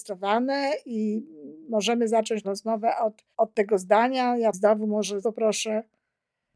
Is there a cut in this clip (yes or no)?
yes